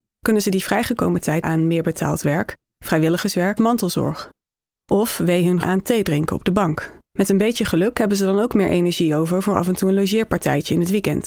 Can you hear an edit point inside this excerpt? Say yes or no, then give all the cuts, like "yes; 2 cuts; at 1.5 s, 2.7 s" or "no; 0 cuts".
yes; 4 cuts; at 1.4 s, 3.6 s, 5.6 s, 7.0 s